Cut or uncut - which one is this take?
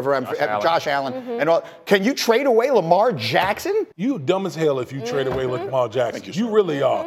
cut